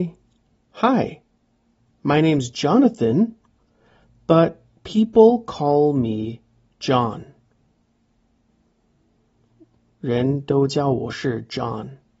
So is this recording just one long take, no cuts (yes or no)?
yes